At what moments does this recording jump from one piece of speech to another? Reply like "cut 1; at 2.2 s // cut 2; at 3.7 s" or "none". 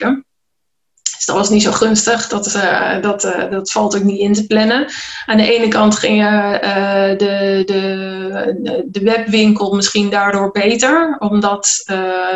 none